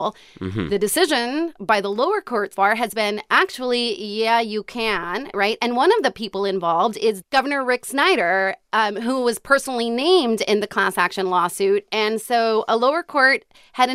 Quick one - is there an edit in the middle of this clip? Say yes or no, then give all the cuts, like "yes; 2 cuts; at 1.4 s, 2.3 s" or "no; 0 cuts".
yes; 1 cut; at 2.5 s